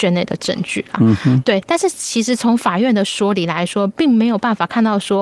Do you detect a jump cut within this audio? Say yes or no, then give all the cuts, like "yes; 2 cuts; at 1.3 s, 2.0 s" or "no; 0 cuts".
no; 0 cuts